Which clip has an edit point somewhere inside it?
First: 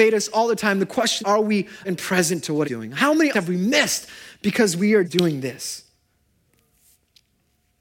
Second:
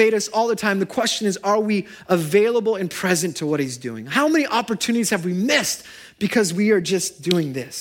first; 5 cuts; at 1.2 s, 1.8 s, 2.6 s, 3.3 s, 5.0 s

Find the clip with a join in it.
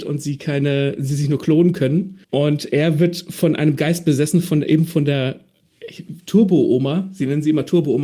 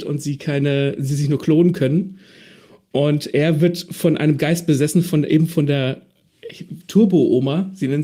first; 1 cut; at 2.2 s

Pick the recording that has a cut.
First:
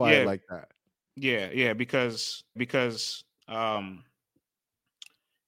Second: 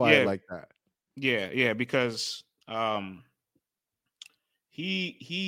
first; 1 cut; at 2.6 s

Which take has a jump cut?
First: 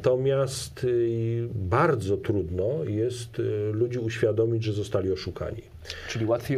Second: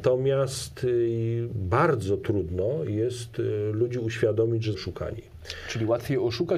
second; 1 cut; at 4.7 s

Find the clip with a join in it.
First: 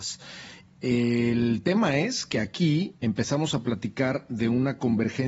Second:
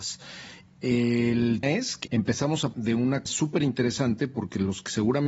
second; 4 cuts; at 1.6 s, 2.0 s, 2.7 s, 3.3 s

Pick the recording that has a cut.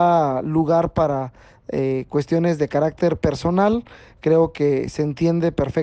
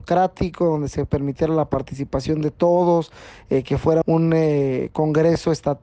second; 1 cut; at 4.0 s

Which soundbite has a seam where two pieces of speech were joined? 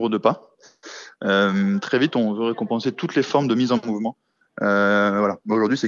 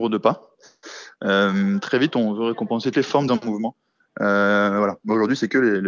second; 2 cuts; at 2.9 s, 3.3 s

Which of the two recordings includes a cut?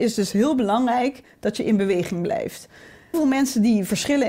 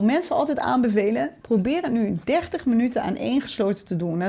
first; 1 cut; at 3.1 s

